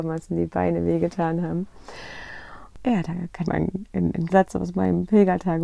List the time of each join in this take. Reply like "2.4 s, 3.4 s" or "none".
3.4 s, 4.3 s

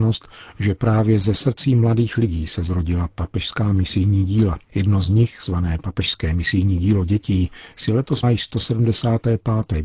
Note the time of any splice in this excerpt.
4.6 s, 8.2 s

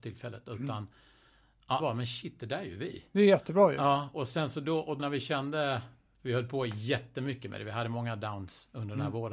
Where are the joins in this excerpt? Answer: 1.8 s, 5.0 s

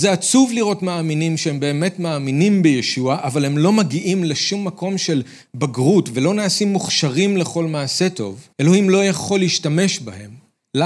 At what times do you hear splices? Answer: 8.5 s

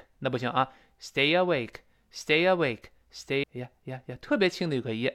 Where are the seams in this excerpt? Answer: 3.4 s

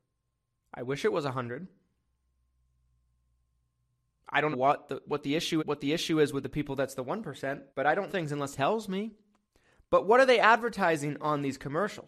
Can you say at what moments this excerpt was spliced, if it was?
4.5 s, 5.6 s, 7.7 s, 8.1 s, 8.5 s, 9.4 s

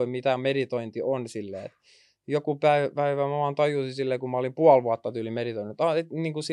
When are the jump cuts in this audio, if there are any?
none

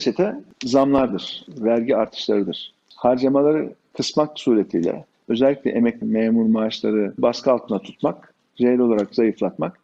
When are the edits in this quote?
6.0 s, 7.2 s

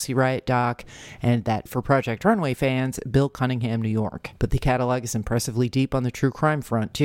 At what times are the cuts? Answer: 1.7 s, 4.4 s

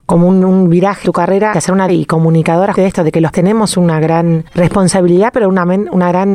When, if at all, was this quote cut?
1.0 s, 1.5 s, 1.9 s, 2.7 s, 3.3 s, 4.5 s

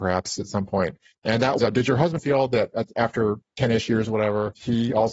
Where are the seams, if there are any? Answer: 1.1 s, 1.6 s, 2.2 s

